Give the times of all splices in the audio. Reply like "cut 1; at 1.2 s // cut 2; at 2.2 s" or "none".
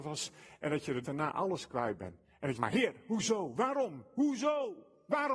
cut 1; at 1.0 s // cut 2; at 2.6 s